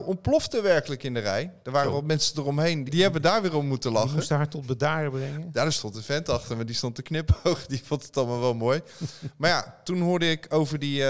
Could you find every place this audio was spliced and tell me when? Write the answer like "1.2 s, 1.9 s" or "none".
2.9 s